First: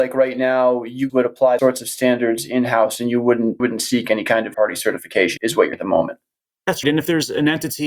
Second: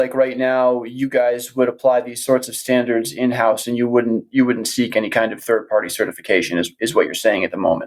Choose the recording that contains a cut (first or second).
first